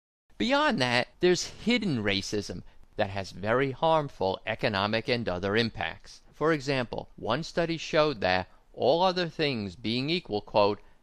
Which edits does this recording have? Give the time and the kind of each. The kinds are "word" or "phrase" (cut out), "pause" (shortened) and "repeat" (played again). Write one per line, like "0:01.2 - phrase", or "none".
0:01.1 - pause
0:06.3 - pause
0:07.1 - pause